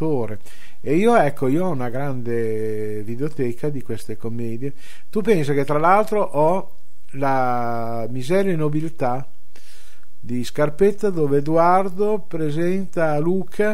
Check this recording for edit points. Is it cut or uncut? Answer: uncut